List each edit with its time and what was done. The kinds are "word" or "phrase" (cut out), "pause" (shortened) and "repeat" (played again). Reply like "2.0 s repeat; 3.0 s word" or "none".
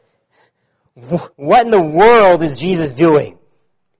1.3 s pause